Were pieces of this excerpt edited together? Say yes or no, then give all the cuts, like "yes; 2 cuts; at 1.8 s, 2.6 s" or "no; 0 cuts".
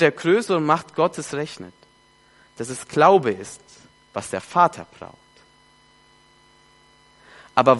no; 0 cuts